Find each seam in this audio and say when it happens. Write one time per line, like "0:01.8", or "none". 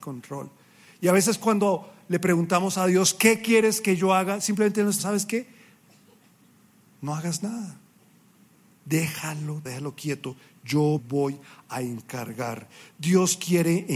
0:05.0
0:09.7
0:11.0